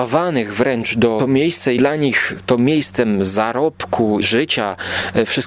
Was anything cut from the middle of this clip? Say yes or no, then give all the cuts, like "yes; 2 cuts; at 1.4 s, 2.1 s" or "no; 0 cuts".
yes; 3 cuts; at 1.2 s, 1.8 s, 4.2 s